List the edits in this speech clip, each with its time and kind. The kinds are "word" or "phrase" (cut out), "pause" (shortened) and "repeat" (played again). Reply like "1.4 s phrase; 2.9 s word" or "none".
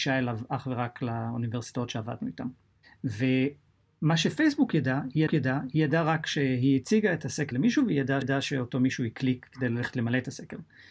5.3 s repeat; 7.5 s word; 8.2 s repeat